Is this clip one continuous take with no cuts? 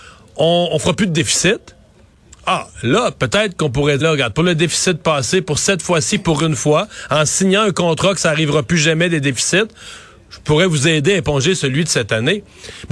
no; 1 cut; at 4.0 s

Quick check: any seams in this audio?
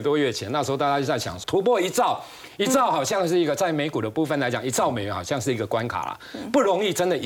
yes; 1 cut; at 1.4 s

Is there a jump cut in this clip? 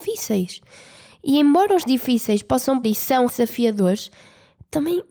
yes; 3 cuts; at 1.9 s, 2.8 s, 3.3 s

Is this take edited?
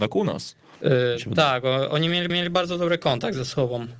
yes; 1 cut; at 2.3 s

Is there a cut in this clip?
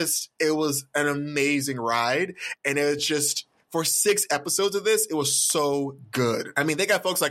no; 0 cuts

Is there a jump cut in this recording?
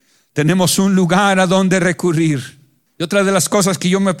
yes; 1 cut; at 2.9 s

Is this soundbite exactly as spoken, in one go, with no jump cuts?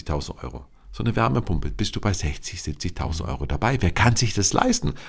yes; 0 cuts

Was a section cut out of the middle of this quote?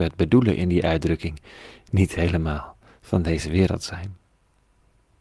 no; 0 cuts

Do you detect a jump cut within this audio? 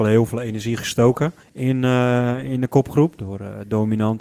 yes; 1 cut; at 1.4 s

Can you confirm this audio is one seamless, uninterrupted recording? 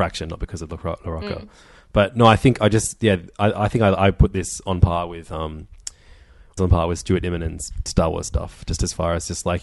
no; 1 cut; at 6.6 s

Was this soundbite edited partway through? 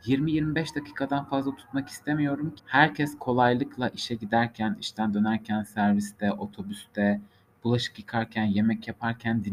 yes; 1 cut; at 2.6 s

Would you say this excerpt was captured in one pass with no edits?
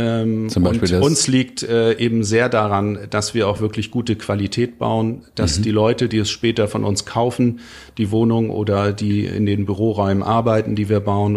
yes; 0 cuts

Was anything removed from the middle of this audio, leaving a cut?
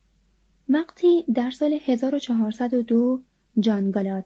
no; 0 cuts

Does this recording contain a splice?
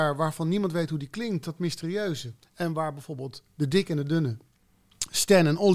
no; 0 cuts

